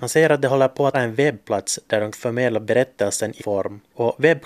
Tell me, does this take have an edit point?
yes; 3 cuts; at 0.9 s, 2.1 s, 3.4 s

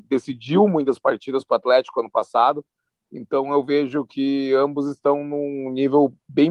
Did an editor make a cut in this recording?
no; 0 cuts

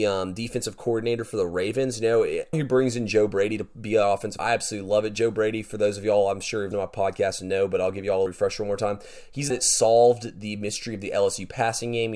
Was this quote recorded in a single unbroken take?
no; 5 cuts; at 2.5 s, 4.4 s, 6.7 s, 8.3 s, 9.5 s

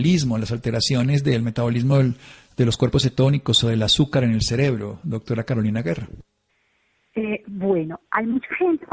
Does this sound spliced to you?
no; 0 cuts

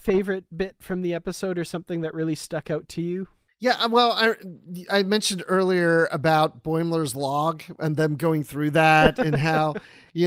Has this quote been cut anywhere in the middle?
no; 0 cuts

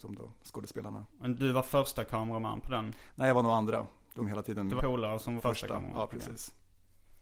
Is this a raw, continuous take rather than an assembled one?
no; 3 cuts; at 4.2 s, 4.8 s, 5.4 s

